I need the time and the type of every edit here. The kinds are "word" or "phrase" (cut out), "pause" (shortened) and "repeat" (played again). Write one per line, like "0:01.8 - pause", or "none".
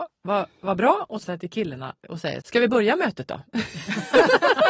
0:01.2 - word
0:02.4 - phrase